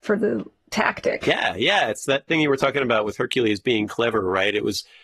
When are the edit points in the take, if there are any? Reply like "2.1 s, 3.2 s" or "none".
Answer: none